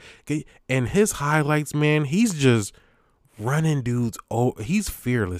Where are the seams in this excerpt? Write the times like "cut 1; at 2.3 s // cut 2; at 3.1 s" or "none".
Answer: none